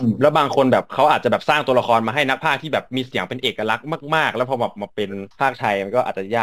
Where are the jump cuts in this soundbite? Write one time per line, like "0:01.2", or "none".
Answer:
0:05.3